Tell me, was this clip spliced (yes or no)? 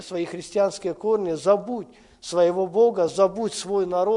no